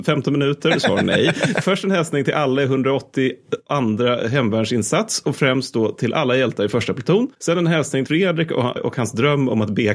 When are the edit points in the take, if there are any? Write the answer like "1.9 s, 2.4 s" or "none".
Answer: 1.6 s, 8.1 s, 8.8 s

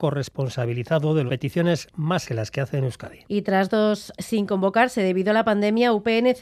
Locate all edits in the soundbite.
1.3 s, 2.2 s, 3.2 s, 4.1 s

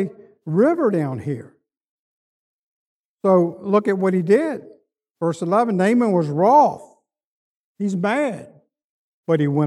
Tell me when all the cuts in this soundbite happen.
none

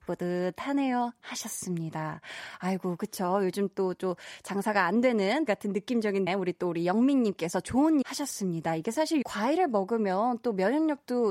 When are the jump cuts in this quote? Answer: 5.5 s, 6.3 s, 8.0 s, 9.2 s

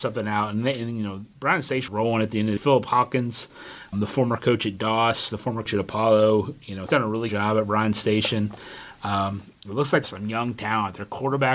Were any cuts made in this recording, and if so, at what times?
1.9 s, 2.6 s, 3.9 s, 5.7 s, 6.9 s, 7.3 s, 10.0 s

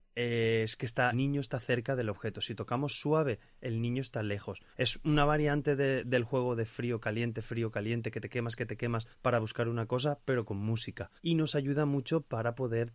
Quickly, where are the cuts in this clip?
1.1 s, 4.7 s, 9.1 s, 11.2 s

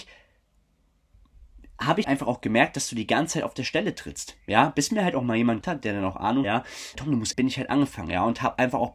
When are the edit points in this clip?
2.0 s, 5.6 s, 6.4 s, 6.9 s, 7.3 s

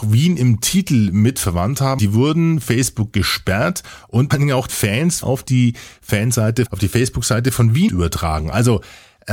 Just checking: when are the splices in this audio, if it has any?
2.0 s, 2.6 s, 4.3 s, 4.7 s, 5.2 s, 6.7 s, 7.9 s

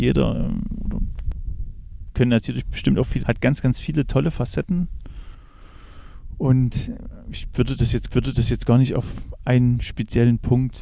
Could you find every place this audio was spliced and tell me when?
3.2 s, 8.1 s

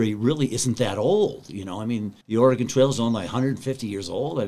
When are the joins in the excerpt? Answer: 2.2 s

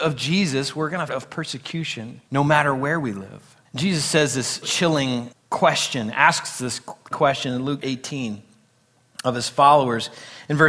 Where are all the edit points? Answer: 1.1 s, 2.3 s, 3.7 s, 4.6 s, 5.3 s, 7.1 s, 7.8 s

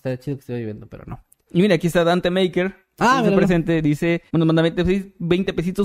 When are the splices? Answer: 4.3 s

